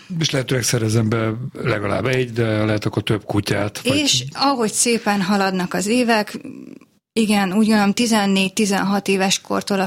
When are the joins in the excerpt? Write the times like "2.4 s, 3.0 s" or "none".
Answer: none